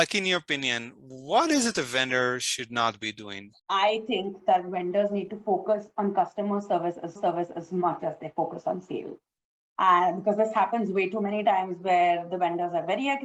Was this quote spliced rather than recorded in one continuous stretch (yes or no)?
yes